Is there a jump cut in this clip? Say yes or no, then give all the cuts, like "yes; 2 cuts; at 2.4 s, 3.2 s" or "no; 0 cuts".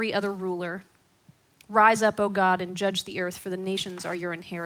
no; 0 cuts